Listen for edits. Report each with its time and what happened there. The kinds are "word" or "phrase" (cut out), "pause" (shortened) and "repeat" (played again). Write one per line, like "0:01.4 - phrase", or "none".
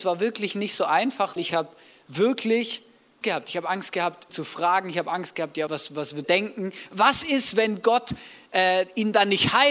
0:01.4 - word
0:03.2 - word
0:04.3 - word
0:05.7 - word
0:06.2 - word

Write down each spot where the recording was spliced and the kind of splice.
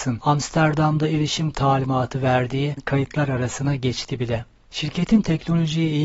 0:01.5 - word
0:02.8 - word

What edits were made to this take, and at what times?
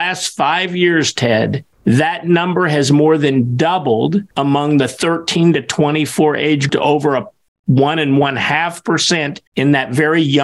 0:01.7 - pause
0:04.3 - pause
0:06.7 - word
0:09.5 - pause

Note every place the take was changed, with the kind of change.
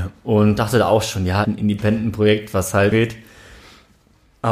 0:01.4 - phrase
0:02.9 - phrase

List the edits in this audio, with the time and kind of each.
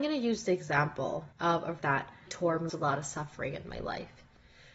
0:01.3 - pause
0:01.8 - word
0:02.3 - word
0:02.7 - phrase

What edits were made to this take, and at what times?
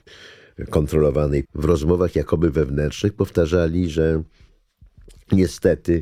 0:01.4 - phrase

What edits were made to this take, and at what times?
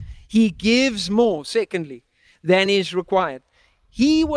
none

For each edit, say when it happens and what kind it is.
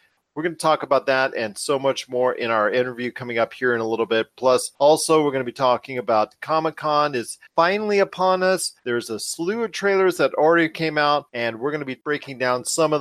0:04.7 - pause
0:07.5 - pause
0:08.8 - pause
0:11.3 - pause

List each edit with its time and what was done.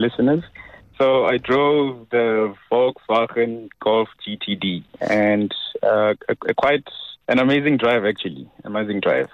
0:04.9 - pause
0:07.2 - pause

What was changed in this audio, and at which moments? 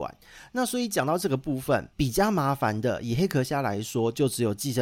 0:01.9 - pause

